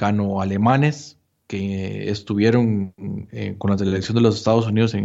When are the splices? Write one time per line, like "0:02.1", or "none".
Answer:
none